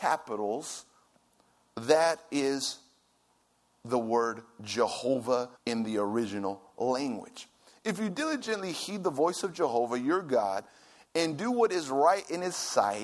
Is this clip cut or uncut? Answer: cut